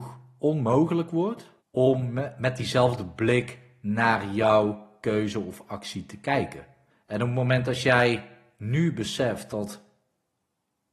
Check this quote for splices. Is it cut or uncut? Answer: cut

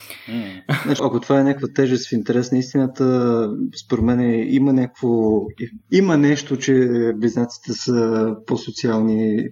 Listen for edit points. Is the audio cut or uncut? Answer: cut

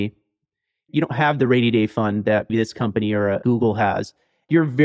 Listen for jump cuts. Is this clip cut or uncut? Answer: cut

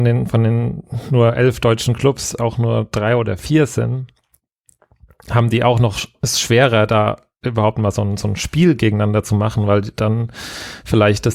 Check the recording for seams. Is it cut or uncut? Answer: uncut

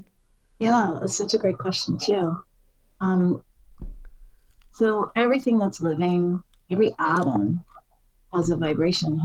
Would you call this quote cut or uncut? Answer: uncut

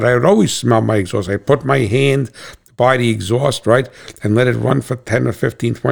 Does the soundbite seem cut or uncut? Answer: uncut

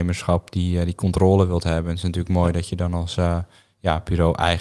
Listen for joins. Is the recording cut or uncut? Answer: uncut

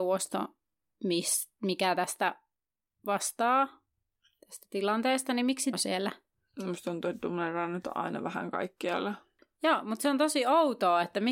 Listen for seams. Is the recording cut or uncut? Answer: cut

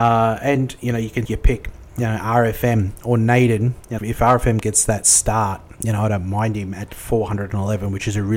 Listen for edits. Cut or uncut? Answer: cut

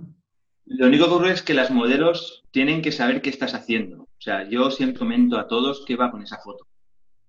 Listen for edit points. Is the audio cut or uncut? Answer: cut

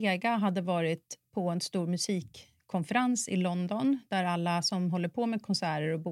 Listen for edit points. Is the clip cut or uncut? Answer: uncut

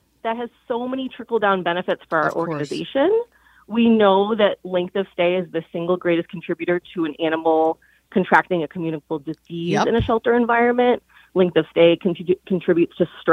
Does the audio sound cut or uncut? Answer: uncut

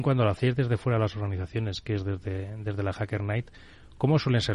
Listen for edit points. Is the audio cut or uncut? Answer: uncut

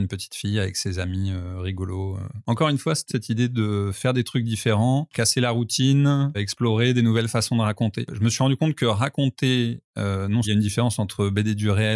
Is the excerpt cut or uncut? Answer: cut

